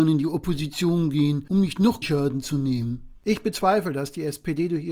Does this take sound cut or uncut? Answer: cut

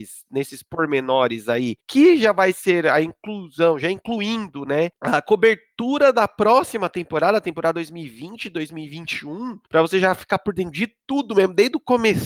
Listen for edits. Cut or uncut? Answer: cut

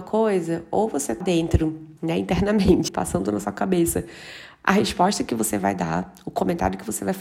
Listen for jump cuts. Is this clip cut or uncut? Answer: cut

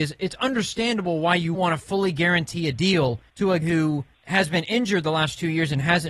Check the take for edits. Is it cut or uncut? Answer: cut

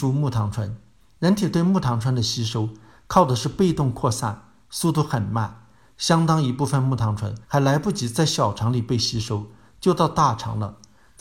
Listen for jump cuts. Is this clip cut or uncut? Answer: cut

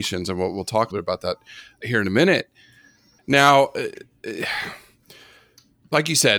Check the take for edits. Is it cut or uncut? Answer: cut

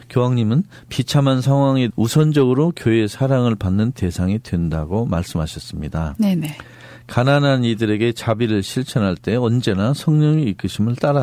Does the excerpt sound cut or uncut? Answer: cut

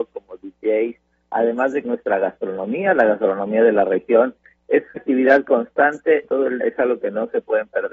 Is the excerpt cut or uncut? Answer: cut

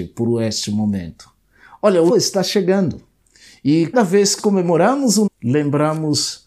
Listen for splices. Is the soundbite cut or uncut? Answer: cut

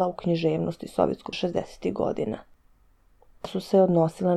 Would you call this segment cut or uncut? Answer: cut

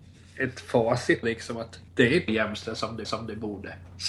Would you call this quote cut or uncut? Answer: cut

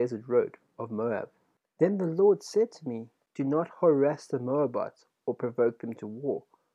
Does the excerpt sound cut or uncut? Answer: uncut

